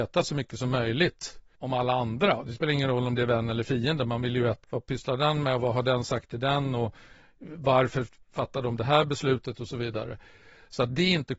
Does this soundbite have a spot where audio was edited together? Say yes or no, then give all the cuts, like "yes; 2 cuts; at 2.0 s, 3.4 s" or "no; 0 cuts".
yes; 2 cuts; at 1.6 s, 4.6 s